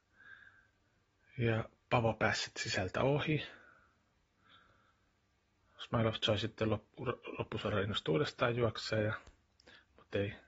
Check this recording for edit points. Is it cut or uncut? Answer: uncut